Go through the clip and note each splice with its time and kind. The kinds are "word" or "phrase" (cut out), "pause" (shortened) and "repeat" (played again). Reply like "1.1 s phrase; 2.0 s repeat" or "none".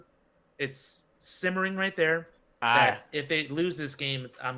none